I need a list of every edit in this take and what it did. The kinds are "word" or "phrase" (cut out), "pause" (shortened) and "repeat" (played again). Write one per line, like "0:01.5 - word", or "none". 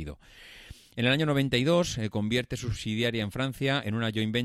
none

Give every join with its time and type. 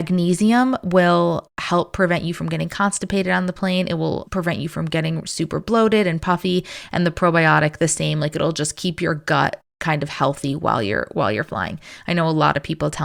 0:04.3 - word

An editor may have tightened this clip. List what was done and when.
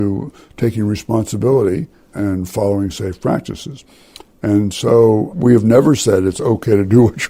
none

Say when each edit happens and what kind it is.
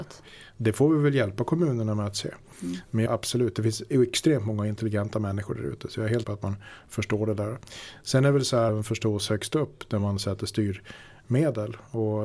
0:03.1 - phrase
0:06.2 - word
0:08.7 - phrase

